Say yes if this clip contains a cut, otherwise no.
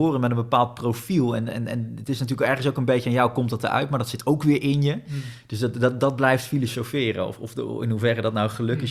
no